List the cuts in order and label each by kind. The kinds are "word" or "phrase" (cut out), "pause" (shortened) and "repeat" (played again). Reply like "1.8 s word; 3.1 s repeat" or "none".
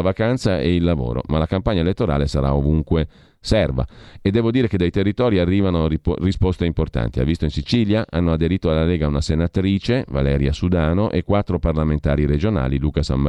none